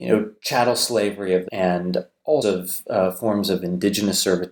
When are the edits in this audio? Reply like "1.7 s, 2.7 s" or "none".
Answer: 1.5 s, 2.4 s